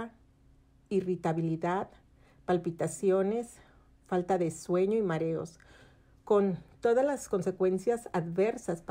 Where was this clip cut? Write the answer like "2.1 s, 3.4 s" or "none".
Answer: none

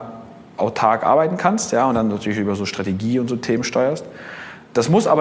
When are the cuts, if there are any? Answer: none

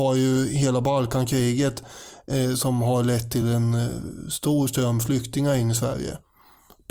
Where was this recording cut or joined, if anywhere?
none

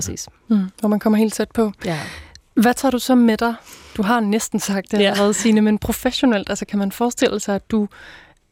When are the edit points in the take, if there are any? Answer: none

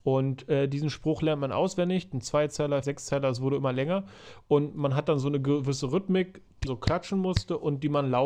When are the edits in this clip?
2.8 s, 6.7 s

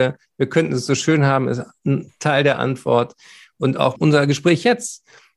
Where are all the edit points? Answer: none

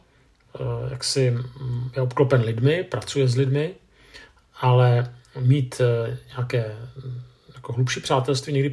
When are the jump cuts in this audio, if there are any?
none

